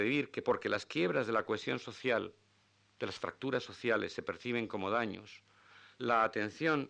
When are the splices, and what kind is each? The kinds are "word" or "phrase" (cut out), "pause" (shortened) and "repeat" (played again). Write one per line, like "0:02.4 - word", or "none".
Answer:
0:02.6 - pause